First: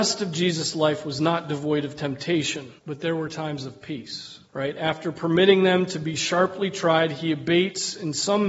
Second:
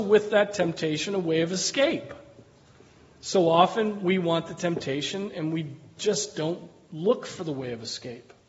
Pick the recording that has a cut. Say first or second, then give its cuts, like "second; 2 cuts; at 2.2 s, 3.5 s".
first; 2 cuts; at 2.8 s, 4.4 s